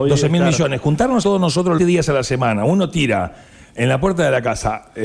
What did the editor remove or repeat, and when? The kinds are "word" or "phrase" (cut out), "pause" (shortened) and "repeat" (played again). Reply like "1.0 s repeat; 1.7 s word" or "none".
1.2 s word; 1.8 s phrase